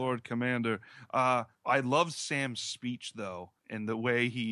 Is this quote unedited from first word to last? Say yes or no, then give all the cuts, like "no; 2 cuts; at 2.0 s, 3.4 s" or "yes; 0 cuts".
no; 2 cuts; at 1.5 s, 3.6 s